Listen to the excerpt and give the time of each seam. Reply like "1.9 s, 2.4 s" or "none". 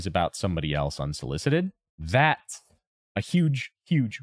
1.9 s